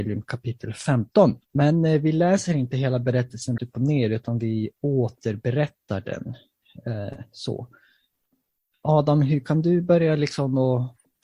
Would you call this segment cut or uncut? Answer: cut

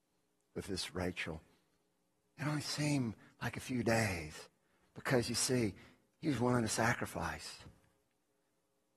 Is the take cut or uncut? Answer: uncut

